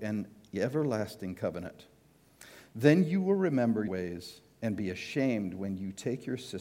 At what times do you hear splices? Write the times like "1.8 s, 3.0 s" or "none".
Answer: 3.9 s